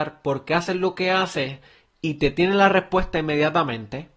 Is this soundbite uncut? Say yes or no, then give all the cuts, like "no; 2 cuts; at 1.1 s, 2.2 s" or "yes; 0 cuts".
yes; 0 cuts